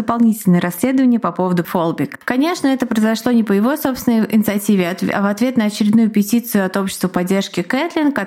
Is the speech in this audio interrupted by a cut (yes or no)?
yes